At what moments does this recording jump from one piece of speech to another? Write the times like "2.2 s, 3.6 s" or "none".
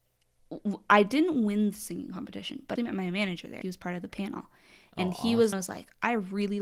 2.8 s, 3.6 s, 5.5 s